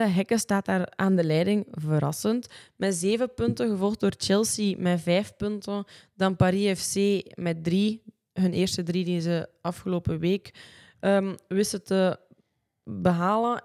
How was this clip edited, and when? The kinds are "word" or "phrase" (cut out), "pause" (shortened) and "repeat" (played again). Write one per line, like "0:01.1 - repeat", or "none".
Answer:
none